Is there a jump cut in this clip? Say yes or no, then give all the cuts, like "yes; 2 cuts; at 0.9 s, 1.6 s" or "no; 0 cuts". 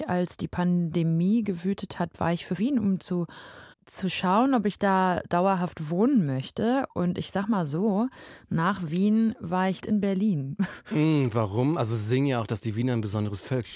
yes; 3 cuts; at 2.6 s, 3.7 s, 9.8 s